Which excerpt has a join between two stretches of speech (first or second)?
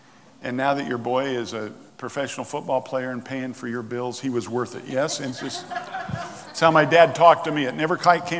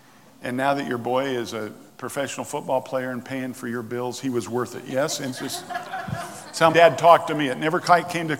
second